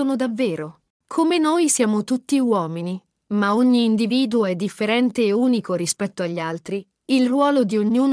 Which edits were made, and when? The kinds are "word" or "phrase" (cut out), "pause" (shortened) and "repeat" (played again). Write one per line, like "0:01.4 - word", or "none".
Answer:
none